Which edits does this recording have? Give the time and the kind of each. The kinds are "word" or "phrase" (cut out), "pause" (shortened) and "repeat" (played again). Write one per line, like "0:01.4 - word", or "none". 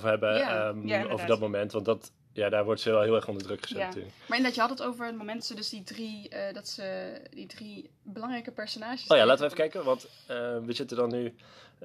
0:05.4 - phrase